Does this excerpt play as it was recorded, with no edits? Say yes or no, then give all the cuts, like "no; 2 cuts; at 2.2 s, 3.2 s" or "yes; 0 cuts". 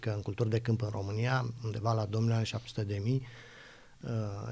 yes; 0 cuts